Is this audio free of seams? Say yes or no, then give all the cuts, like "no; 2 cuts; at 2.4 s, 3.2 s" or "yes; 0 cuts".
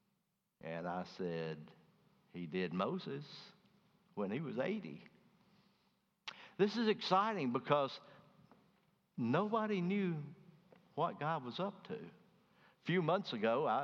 yes; 0 cuts